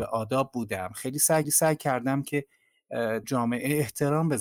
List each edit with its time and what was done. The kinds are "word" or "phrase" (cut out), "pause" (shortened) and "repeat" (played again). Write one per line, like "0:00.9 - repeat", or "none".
0:01.4 - repeat
0:03.2 - word